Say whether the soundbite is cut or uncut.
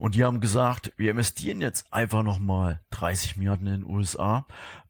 uncut